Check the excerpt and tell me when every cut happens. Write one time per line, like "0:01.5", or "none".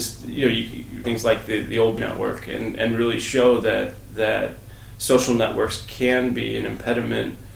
0:01.0
0:02.0